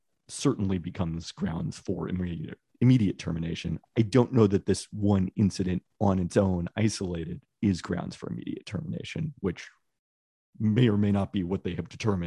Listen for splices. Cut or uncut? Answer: uncut